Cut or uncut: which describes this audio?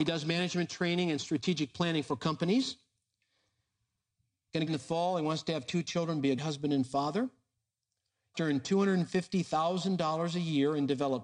cut